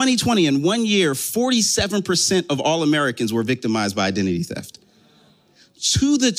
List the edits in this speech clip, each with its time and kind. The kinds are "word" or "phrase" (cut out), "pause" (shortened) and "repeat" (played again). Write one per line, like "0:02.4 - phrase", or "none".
none